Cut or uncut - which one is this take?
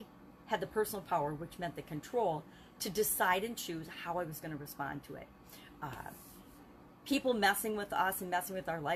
uncut